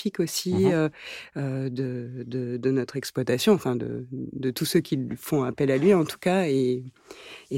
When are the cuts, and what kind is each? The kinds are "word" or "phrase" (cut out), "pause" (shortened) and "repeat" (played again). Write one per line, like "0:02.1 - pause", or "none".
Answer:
none

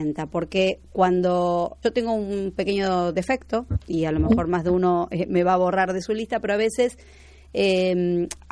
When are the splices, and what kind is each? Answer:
0:01.8 - word

